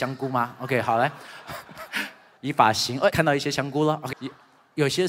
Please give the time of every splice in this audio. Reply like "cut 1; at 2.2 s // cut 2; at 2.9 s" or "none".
cut 1; at 2.4 s // cut 2; at 3.1 s // cut 3; at 4.1 s